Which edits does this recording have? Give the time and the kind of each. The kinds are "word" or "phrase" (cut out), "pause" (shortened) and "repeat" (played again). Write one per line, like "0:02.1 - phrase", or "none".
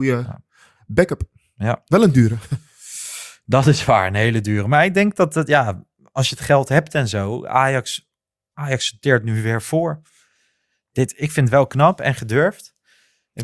none